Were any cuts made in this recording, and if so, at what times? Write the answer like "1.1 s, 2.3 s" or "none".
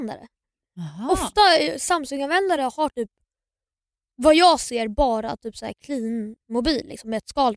none